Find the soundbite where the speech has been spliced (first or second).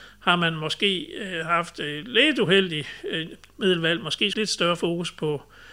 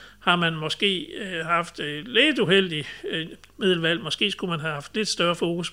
first